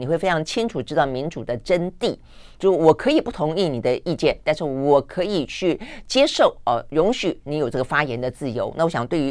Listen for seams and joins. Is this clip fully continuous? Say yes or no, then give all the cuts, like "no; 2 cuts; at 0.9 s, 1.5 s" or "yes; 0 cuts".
yes; 0 cuts